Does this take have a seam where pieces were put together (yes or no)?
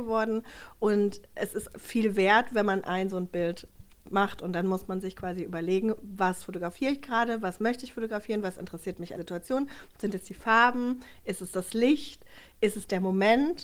yes